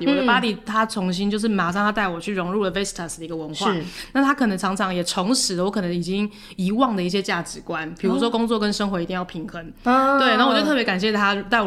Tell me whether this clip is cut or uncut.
uncut